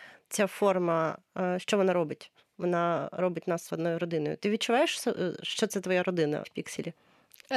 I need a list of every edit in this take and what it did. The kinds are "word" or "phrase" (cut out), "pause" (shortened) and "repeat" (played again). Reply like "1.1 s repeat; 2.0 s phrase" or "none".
3.7 s word; 6.4 s word